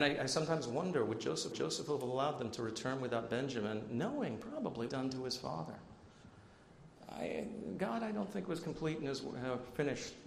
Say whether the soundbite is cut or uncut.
cut